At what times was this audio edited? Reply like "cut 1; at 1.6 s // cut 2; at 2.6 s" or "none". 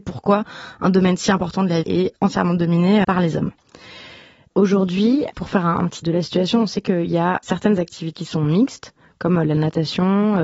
cut 1; at 1.8 s // cut 2; at 2.1 s // cut 3; at 3.0 s // cut 4; at 5.3 s // cut 5; at 6.0 s // cut 6; at 7.4 s // cut 7; at 8.1 s

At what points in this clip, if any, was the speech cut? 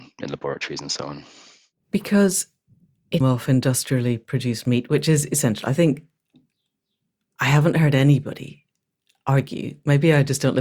cut 1; at 3.2 s

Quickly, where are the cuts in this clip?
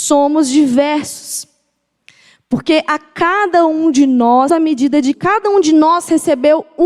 cut 1; at 4.5 s // cut 2; at 5.1 s

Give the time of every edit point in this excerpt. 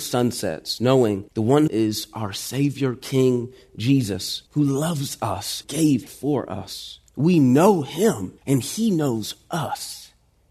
cut 1; at 1.3 s // cut 2; at 1.7 s // cut 3; at 4.5 s // cut 4; at 5.6 s // cut 5; at 6.1 s // cut 6; at 7.1 s // cut 7; at 8.4 s

